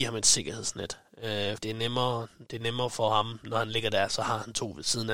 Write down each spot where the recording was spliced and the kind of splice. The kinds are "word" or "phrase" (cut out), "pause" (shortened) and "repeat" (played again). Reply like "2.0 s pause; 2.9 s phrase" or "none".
1.6 s word